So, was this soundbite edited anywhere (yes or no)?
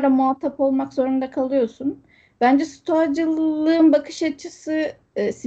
no